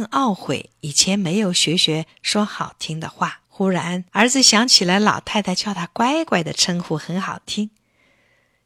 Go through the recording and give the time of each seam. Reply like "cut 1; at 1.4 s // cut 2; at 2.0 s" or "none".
cut 1; at 3.4 s // cut 2; at 4.1 s